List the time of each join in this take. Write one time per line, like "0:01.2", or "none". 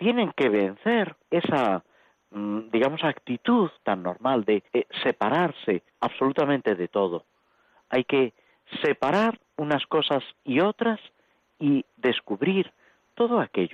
0:01.2
0:03.8
0:04.7
0:05.9
0:09.4
0:11.9

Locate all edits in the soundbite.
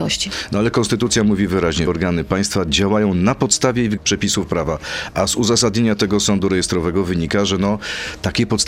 0:01.9
0:04.0

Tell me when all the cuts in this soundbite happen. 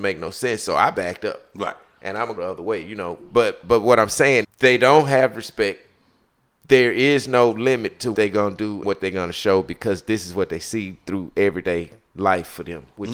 0:02.4
0:04.4
0:08.1
0:08.8

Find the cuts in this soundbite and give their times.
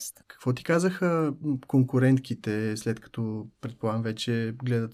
none

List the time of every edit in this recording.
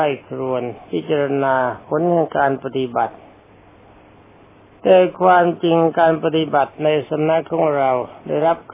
none

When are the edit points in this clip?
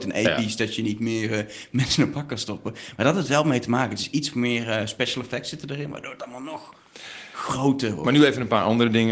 none

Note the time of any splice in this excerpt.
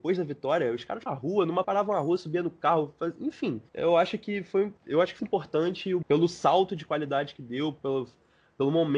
0:01.1
0:01.6
0:03.7
0:04.8
0:05.2
0:06.0

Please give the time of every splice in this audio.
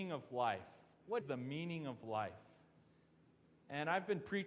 0:01.2

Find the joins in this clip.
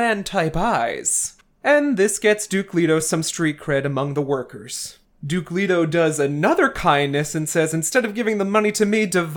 none

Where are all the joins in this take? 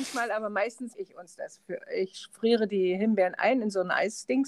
0:00.9

